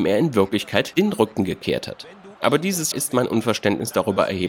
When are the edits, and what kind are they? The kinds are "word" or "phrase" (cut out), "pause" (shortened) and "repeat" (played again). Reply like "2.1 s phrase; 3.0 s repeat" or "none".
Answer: 0.9 s word; 2.9 s word